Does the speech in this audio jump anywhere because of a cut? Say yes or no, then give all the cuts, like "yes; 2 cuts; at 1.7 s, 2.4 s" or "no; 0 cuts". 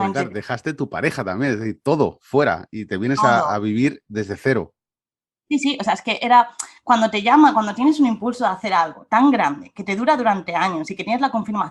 no; 0 cuts